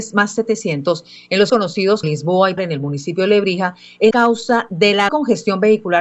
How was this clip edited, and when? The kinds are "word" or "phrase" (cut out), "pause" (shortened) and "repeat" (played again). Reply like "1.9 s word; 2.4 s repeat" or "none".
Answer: 1.5 s word; 2.0 s word; 2.6 s word; 4.1 s word; 5.1 s word

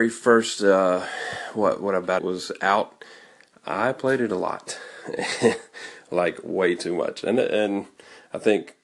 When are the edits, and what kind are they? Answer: 2.2 s phrase

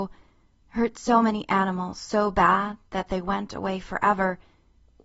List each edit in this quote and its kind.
none

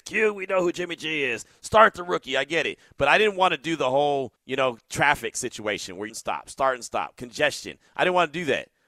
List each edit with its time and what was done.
4.4 s pause; 6.1 s phrase

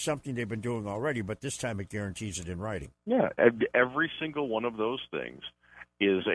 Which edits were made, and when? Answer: 3.0 s pause

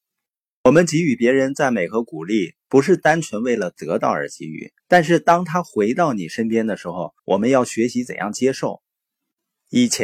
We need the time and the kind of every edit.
4.8 s pause; 7.2 s pause

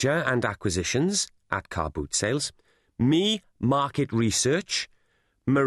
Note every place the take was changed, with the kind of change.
none

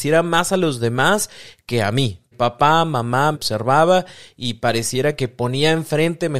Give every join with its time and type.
2.3 s word; 3.3 s word

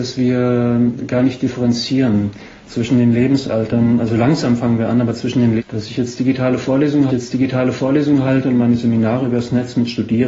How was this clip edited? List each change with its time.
5.6 s word; 7.1 s repeat

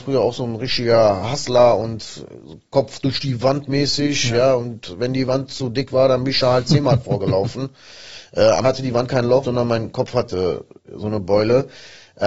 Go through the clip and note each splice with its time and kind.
8.6 s word; 9.4 s phrase

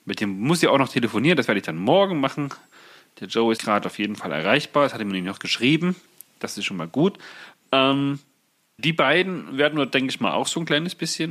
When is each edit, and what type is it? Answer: 3.6 s word; 8.8 s word

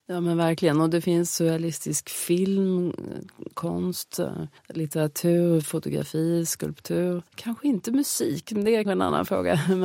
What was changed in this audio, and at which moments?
4.6 s pause; 7.3 s pause; 8.8 s word

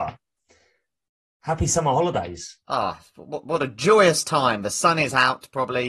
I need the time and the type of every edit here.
2.6 s pause

